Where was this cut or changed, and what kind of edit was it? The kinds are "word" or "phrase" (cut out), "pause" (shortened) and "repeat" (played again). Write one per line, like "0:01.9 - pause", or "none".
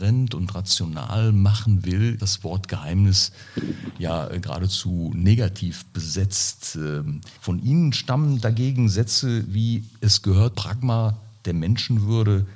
0:02.2 - word
0:07.4 - pause
0:10.5 - word